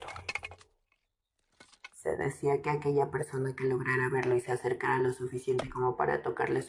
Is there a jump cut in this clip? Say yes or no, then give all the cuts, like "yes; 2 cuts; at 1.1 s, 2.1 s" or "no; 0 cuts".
no; 0 cuts